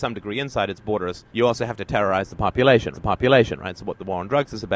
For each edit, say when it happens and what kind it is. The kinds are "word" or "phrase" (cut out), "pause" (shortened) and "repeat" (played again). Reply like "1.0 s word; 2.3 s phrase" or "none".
1.3 s pause; 2.9 s repeat